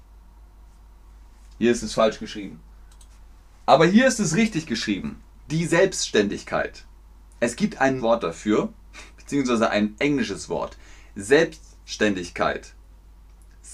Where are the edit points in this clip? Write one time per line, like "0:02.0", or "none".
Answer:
0:08.0
0:09.1

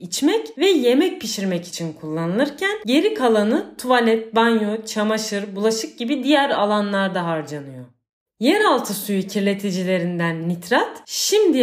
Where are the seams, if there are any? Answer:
none

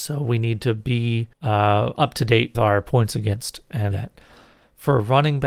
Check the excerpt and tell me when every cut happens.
0:01.3
0:02.5
0:03.9

